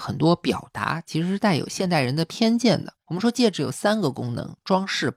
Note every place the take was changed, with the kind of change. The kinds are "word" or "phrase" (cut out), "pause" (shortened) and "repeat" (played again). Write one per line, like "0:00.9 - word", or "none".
0:03.0 - pause